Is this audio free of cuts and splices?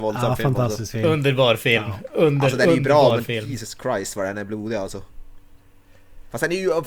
yes; 0 cuts

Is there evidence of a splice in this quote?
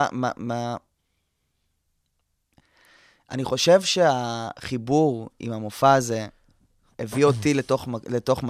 no; 0 cuts

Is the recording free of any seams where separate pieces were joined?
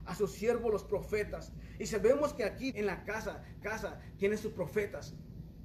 no; 2 cuts; at 2.7 s, 3.6 s

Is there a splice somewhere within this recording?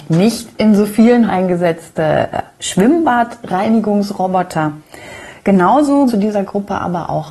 yes; 2 cuts; at 1.3 s, 6.1 s

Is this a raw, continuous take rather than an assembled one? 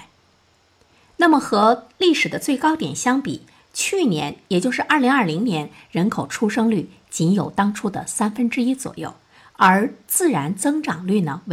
yes; 0 cuts

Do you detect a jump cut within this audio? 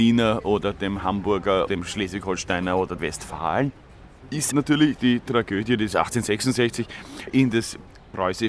yes; 5 cuts; at 1.7 s, 3.0 s, 4.5 s, 5.0 s, 5.9 s

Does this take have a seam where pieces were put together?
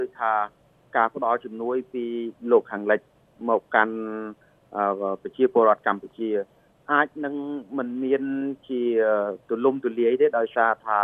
no; 0 cuts

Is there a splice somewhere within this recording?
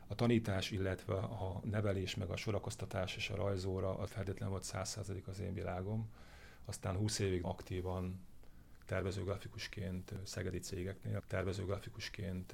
yes; 3 cuts; at 4.1 s, 7.4 s, 11.2 s

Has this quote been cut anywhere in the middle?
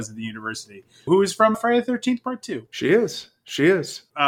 yes; 2 cuts; at 1.1 s, 1.5 s

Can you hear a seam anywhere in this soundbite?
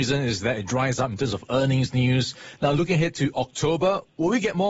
no; 0 cuts

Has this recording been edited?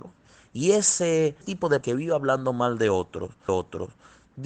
yes; 3 cuts; at 1.4 s, 1.8 s, 3.5 s

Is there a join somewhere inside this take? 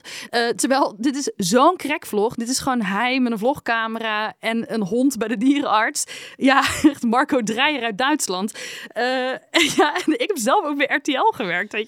no; 0 cuts

